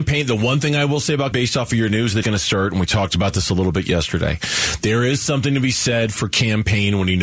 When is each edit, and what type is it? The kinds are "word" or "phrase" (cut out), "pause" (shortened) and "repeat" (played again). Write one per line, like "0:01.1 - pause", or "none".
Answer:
0:01.3 - word
0:02.2 - word